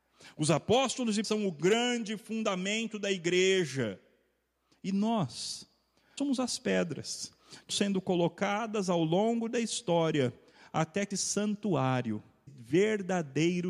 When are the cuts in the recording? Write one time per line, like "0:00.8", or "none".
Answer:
0:01.2
0:06.2
0:07.7
0:11.1
0:12.5